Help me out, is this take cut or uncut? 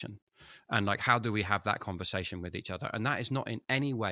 uncut